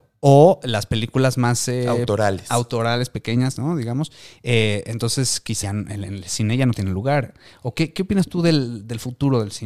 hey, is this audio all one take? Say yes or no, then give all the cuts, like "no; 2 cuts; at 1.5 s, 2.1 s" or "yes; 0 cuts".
no; 1 cut; at 5.6 s